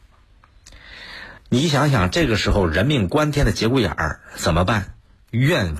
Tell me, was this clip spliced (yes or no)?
yes